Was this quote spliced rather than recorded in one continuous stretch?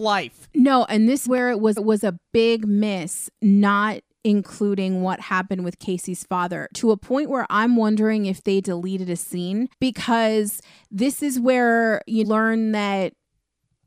yes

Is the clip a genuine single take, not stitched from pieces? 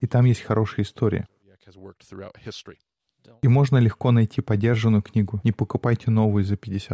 yes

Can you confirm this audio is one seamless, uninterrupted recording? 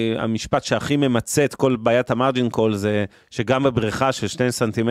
yes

